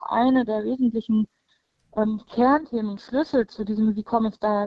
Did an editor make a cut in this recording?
no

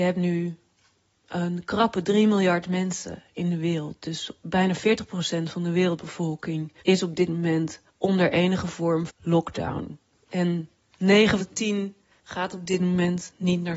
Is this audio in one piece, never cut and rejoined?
no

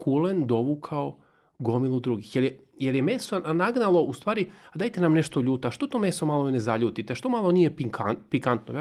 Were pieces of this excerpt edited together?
no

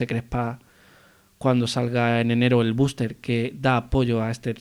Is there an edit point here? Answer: no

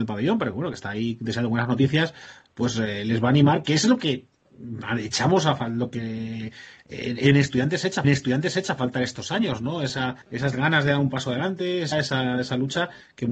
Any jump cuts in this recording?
yes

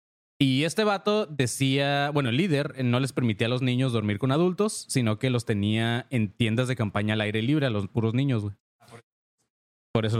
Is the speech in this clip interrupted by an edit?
no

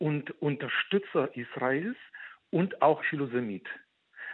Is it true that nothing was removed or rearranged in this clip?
no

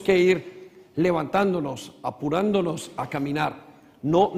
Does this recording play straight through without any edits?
yes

